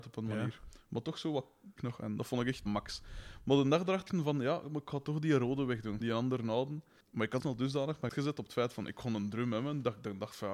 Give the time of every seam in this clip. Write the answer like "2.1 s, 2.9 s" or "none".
1.8 s, 2.7 s, 4.1 s, 6.0 s, 7.0 s, 7.4 s, 8.1 s